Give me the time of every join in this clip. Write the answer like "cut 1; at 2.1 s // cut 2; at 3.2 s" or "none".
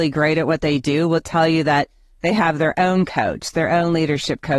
none